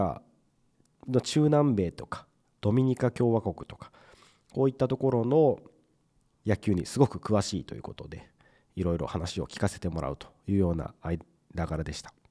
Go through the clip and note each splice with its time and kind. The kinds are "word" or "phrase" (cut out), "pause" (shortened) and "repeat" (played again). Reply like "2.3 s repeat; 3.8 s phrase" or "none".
none